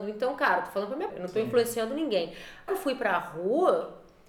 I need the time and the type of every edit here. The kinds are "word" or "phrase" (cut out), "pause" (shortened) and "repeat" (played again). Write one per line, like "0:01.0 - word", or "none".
0:01.1 - word
0:02.7 - word